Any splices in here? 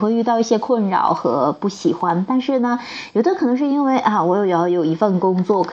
no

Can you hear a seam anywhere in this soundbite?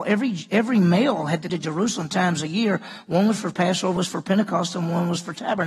yes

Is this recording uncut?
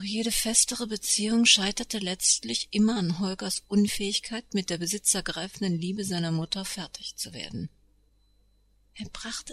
yes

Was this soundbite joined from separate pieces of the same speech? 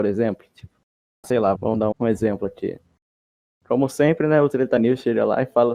yes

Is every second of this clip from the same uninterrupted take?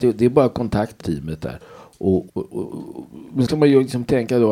no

